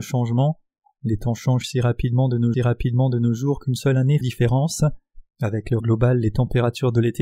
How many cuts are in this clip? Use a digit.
4